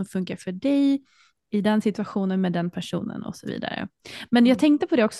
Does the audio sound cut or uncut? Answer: uncut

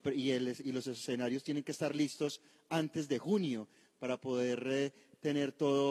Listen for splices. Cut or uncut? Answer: uncut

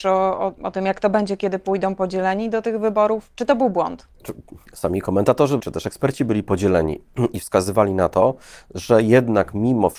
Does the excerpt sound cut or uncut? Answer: cut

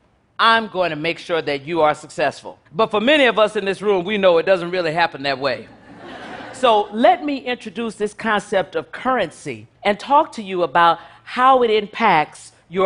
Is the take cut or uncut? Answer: cut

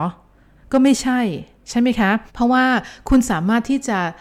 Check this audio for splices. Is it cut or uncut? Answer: cut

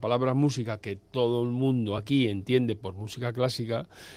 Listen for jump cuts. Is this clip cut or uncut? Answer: uncut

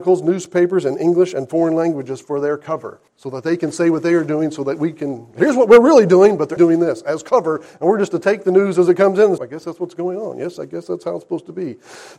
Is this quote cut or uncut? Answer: cut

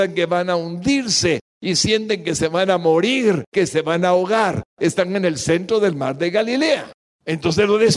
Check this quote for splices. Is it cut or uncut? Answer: uncut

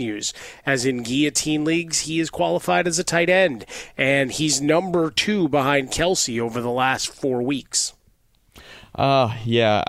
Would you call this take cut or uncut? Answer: uncut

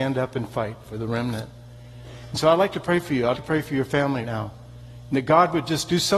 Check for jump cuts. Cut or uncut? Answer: cut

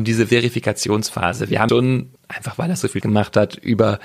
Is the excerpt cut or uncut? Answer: cut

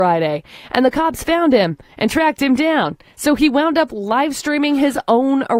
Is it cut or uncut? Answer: uncut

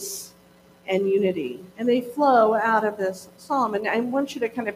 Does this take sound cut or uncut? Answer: cut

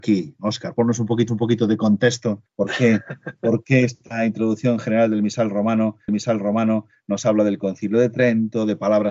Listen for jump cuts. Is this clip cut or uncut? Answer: cut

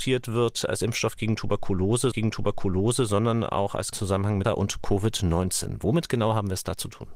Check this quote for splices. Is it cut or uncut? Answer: cut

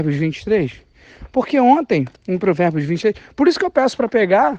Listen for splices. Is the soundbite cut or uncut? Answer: cut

